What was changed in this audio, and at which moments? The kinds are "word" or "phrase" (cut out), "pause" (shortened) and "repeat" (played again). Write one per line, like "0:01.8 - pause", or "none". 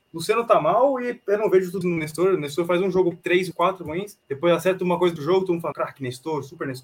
0:01.8 - word
0:03.1 - word
0:03.5 - word
0:04.2 - pause
0:05.2 - word
0:05.7 - word